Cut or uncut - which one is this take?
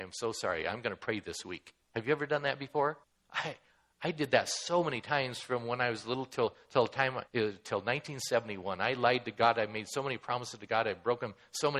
cut